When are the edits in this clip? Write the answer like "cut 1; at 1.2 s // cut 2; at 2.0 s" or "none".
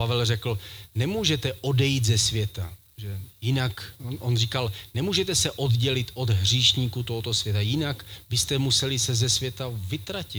none